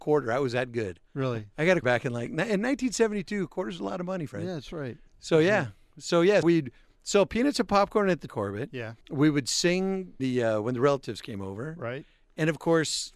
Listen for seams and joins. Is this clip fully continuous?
no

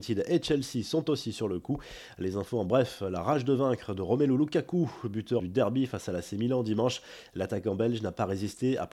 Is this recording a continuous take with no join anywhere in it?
no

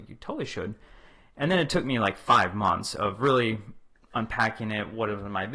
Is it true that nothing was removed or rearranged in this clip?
yes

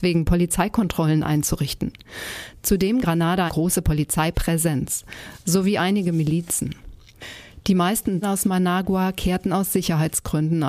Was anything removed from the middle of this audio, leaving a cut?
yes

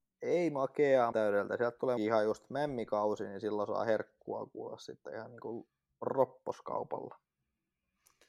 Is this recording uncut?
no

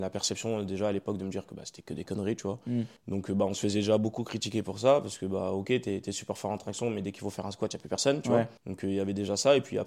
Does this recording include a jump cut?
yes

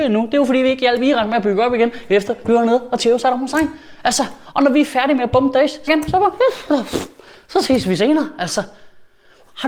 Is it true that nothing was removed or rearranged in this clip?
no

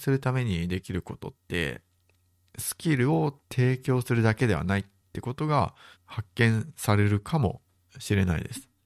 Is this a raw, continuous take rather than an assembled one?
no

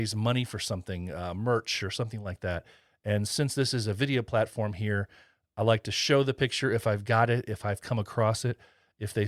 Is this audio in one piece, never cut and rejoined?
yes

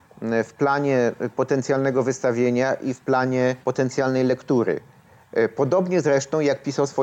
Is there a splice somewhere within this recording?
yes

